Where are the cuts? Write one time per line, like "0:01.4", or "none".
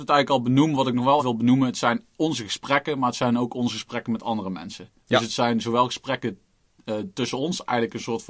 0:01.2